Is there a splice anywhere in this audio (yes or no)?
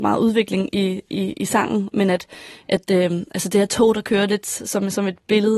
no